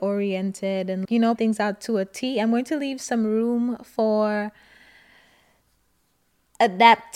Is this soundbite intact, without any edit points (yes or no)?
no